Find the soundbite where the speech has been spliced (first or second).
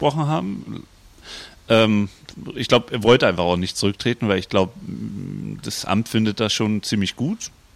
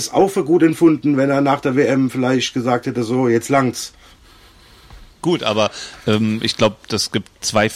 second